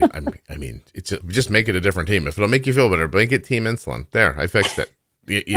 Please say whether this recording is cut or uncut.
cut